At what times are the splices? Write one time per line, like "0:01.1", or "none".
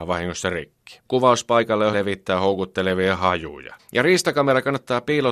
0:01.0
0:01.9
0:03.8